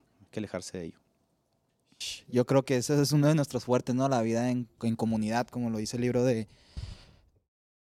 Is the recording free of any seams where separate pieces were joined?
no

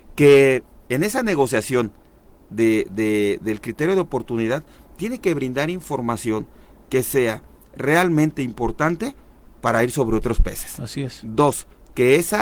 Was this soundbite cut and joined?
no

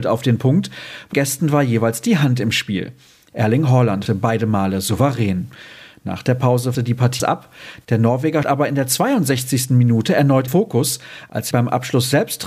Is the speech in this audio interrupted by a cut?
yes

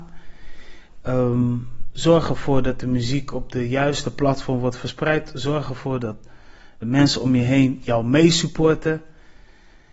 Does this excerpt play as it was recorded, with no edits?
no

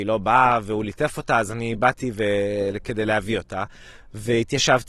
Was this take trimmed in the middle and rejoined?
no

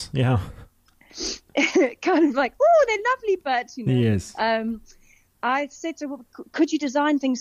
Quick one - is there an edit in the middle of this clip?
no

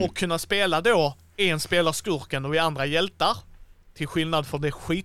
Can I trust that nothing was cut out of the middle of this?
yes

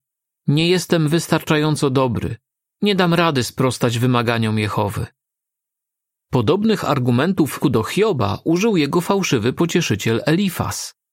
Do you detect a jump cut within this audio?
yes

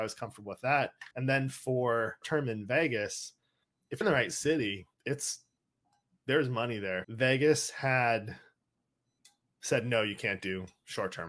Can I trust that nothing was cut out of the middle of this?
no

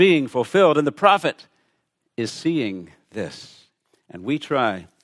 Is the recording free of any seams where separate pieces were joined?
yes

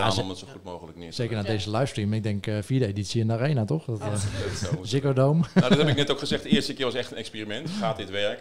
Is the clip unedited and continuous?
yes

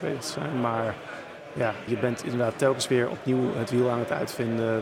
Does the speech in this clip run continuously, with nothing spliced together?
no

